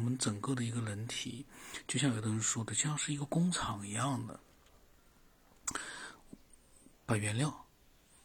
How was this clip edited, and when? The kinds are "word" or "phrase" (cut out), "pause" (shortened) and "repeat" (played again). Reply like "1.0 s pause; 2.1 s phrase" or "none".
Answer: 6.9 s pause